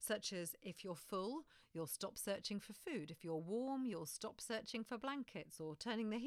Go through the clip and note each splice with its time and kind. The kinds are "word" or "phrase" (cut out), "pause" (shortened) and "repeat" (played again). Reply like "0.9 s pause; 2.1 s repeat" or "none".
none